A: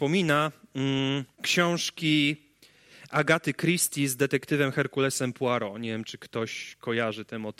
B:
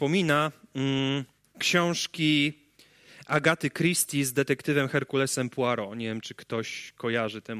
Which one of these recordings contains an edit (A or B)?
A